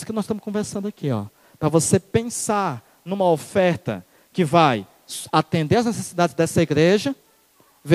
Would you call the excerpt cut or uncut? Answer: uncut